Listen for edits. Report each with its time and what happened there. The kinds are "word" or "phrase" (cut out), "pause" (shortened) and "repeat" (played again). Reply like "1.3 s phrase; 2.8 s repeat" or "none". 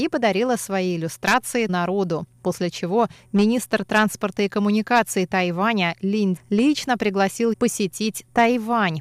1.7 s word; 6.4 s word; 7.5 s word